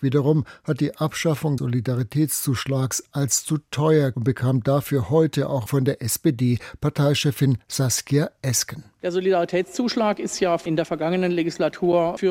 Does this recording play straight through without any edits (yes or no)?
no